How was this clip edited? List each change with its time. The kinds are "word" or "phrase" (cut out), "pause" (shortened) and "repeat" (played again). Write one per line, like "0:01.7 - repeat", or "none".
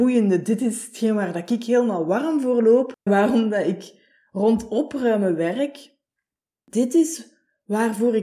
0:03.1 - word